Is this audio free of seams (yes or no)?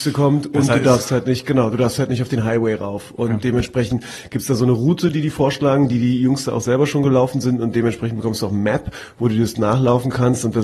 yes